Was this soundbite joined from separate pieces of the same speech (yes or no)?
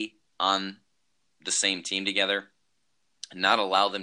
no